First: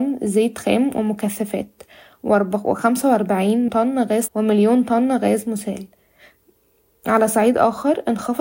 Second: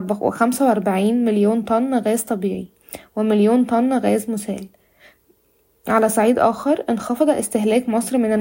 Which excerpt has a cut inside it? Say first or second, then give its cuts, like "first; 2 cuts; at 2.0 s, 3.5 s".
first; 2 cuts; at 3.7 s, 4.3 s